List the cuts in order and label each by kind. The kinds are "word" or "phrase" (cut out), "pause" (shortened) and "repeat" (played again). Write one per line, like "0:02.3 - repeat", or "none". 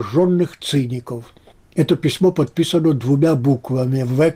none